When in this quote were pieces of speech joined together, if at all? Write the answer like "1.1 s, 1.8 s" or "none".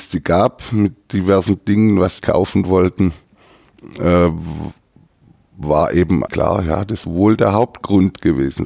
2.2 s, 6.3 s, 7.0 s